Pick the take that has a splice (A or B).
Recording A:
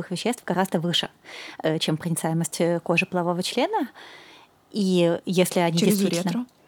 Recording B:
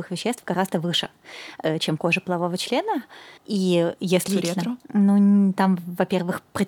B